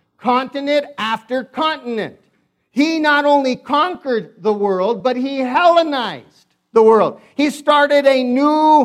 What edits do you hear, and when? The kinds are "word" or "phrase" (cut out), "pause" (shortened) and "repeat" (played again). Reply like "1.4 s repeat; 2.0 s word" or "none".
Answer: none